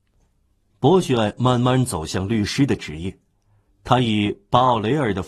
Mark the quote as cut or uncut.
uncut